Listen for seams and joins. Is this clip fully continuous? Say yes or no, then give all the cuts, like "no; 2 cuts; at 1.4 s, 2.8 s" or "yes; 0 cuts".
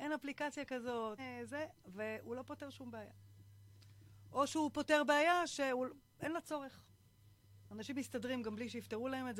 no; 1 cut; at 1.2 s